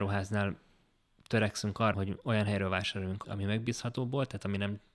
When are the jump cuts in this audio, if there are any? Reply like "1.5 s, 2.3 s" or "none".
1.9 s, 3.2 s